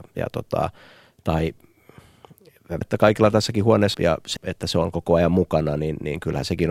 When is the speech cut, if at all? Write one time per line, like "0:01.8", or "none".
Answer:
0:02.8
0:03.9
0:04.4